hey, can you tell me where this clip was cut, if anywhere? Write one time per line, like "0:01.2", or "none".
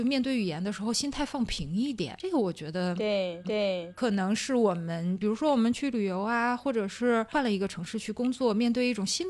0:03.4